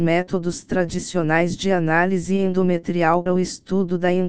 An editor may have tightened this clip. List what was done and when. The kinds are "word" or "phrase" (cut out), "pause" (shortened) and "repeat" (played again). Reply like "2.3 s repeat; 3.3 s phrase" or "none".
3.3 s word